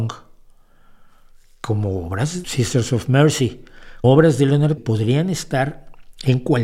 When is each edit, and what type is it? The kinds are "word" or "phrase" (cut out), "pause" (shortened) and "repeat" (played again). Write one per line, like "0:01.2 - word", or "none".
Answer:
0:02.4 - word
0:04.0 - word
0:04.8 - phrase